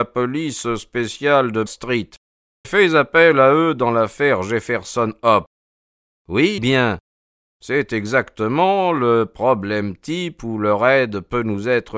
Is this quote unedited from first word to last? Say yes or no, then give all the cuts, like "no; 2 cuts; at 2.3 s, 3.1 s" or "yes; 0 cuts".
no; 3 cuts; at 1.7 s, 2.6 s, 6.6 s